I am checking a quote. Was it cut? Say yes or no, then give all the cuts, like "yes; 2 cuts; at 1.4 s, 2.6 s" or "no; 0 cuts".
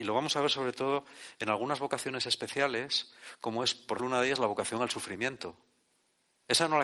yes; 1 cut; at 4.0 s